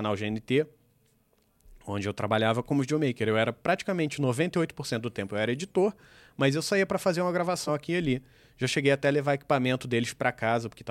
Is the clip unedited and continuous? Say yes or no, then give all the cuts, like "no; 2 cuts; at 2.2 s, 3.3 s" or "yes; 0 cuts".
no; 1 cut; at 7.7 s